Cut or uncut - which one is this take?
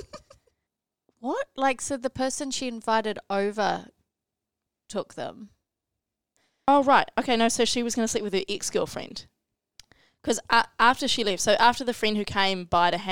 uncut